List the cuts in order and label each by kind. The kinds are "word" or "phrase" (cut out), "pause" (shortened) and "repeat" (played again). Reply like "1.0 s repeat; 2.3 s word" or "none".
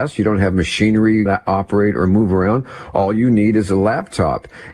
1.3 s word